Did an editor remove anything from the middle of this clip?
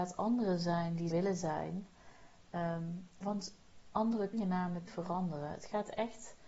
yes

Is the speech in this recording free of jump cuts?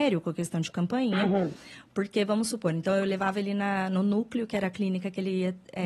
yes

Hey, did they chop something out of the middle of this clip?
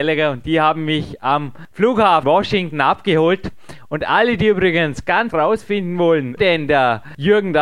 yes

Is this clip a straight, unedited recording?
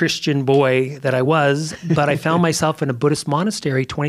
yes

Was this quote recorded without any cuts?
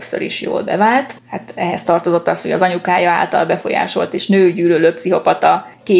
no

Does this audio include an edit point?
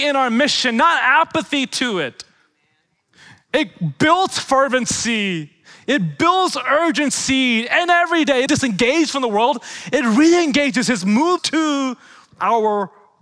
yes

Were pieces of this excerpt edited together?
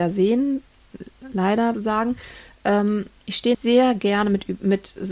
yes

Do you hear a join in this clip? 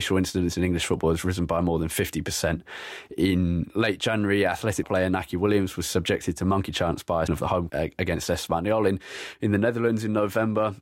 yes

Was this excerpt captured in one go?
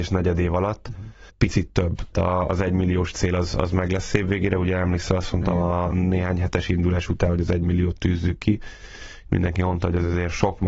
no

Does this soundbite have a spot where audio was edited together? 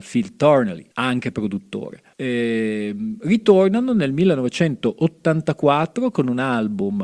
yes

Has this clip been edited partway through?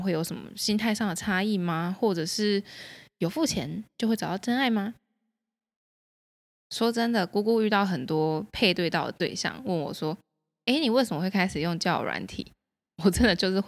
no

